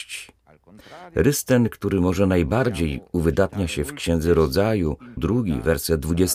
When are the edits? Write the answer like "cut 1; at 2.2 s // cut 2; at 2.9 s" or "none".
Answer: cut 1; at 5.2 s